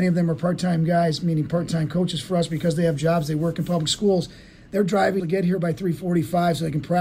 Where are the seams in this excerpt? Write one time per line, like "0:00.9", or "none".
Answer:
0:05.2